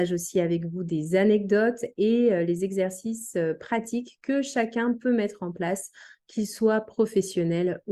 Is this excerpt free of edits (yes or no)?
yes